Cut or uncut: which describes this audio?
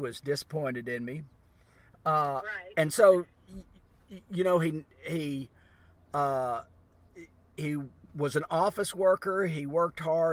uncut